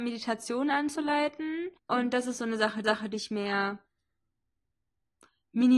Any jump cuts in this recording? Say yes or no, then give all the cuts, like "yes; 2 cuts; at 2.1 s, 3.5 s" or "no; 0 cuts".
yes; 2 cuts; at 1.8 s, 2.8 s